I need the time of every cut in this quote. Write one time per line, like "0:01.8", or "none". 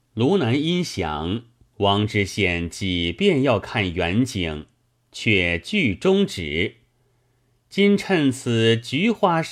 none